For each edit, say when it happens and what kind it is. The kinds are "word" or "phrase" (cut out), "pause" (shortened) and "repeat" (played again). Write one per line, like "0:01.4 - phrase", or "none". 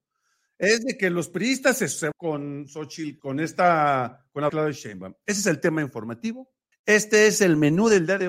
0:02.1 - word
0:03.2 - word
0:04.5 - word
0:06.7 - pause